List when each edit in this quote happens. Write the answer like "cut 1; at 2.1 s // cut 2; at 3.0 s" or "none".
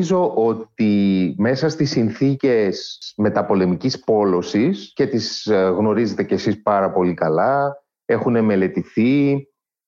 none